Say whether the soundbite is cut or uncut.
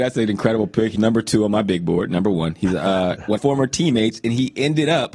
cut